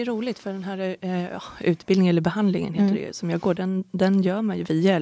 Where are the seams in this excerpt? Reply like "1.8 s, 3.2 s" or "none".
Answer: none